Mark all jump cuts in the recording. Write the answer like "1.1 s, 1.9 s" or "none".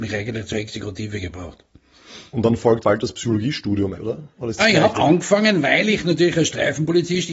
2.8 s, 3.9 s, 4.6 s, 4.9 s

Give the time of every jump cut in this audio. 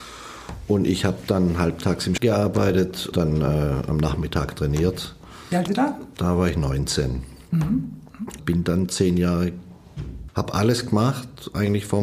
2.2 s, 3.1 s, 5.7 s, 8.4 s, 8.9 s, 10.3 s

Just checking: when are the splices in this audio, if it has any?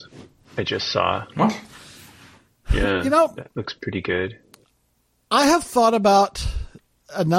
none

